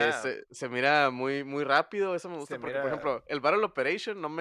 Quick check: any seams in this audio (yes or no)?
no